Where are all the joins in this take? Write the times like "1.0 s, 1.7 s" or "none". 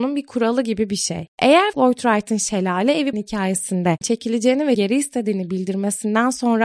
1.7 s, 3.1 s, 4.0 s, 4.8 s